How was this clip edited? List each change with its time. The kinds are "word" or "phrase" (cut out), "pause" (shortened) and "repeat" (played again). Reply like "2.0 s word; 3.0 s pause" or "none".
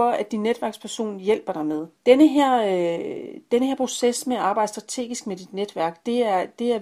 2.0 s pause